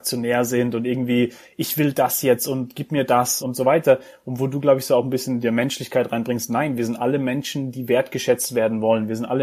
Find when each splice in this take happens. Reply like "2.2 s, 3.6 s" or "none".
3.4 s